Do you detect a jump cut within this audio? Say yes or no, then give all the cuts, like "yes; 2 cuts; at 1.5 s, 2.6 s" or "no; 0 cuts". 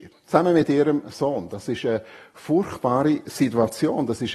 no; 0 cuts